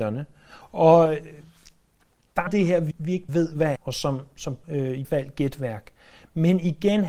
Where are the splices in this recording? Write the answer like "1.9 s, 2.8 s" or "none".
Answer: 2.5 s, 2.9 s, 3.3 s, 3.8 s, 4.6 s, 5.0 s

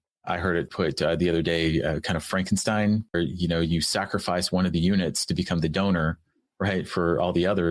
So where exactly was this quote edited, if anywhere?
3.1 s

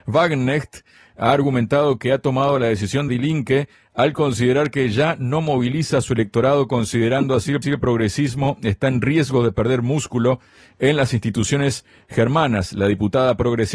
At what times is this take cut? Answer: 3.1 s, 7.6 s

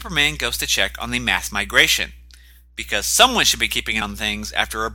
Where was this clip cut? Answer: 4.0 s

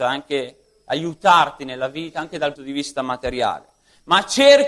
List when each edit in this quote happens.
2.5 s

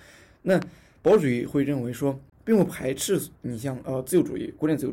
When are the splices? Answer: 3.4 s

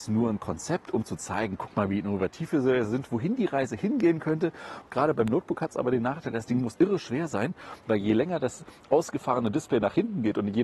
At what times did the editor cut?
6.7 s

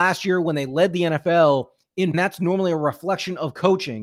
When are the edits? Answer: 2.1 s

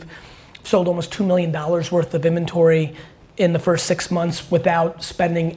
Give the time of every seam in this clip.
none

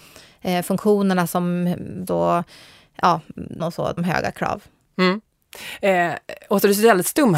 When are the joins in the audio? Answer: 2.1 s, 3.6 s, 4.0 s

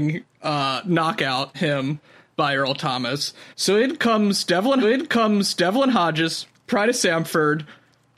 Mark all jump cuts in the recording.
1.5 s, 2.3 s, 3.5 s, 4.8 s

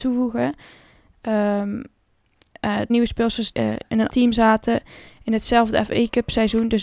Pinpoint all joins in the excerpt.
2.9 s, 3.5 s, 4.1 s

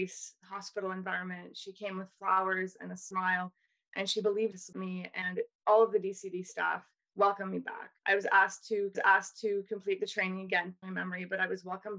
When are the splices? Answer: 4.5 s, 8.0 s, 8.9 s, 10.8 s

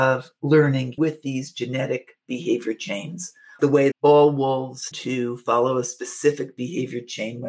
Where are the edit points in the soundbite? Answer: 1.0 s, 3.6 s, 3.9 s, 4.9 s

